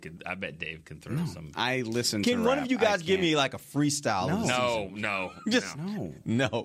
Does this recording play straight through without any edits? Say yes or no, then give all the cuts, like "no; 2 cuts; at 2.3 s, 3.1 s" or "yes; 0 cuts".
yes; 0 cuts